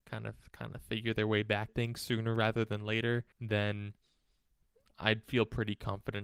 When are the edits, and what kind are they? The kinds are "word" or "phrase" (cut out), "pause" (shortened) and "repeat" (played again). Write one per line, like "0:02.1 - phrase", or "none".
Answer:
0:01.7 - word
0:03.3 - pause